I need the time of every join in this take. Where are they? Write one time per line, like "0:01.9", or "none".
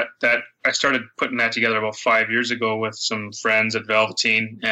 none